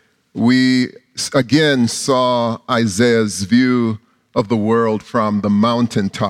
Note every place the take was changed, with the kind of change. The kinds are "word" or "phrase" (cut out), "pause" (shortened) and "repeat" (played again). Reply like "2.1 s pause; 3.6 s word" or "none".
none